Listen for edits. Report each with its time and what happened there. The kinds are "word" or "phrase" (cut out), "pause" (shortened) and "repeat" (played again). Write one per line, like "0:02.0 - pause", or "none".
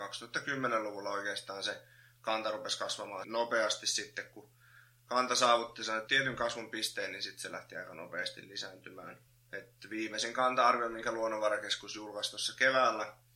0:03.2 - phrase
0:06.1 - word
0:09.3 - pause